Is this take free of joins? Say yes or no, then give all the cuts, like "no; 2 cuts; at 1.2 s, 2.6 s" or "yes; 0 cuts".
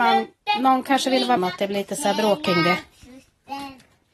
no; 1 cut; at 1.4 s